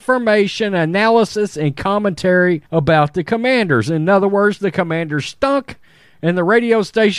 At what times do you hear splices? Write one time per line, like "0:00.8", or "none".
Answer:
0:02.7